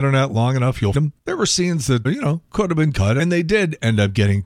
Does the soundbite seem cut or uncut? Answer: cut